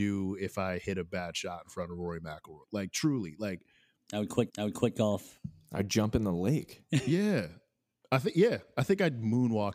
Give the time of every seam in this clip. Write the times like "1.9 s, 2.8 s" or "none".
2.6 s, 4.5 s